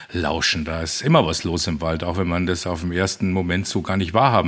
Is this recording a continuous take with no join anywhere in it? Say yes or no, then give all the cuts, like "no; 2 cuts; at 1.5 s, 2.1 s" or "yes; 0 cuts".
yes; 0 cuts